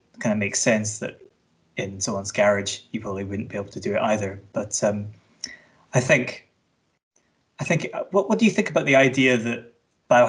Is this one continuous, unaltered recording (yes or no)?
yes